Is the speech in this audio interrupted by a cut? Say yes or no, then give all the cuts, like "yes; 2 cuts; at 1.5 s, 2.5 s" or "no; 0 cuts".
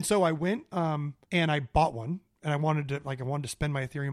yes; 1 cut; at 1.2 s